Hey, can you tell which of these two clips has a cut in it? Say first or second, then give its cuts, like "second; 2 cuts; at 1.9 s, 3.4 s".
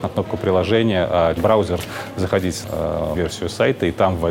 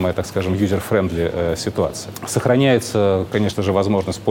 first; 3 cuts; at 1.4 s, 2.6 s, 3.2 s